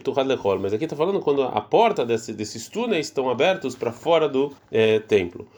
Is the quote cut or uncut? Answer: cut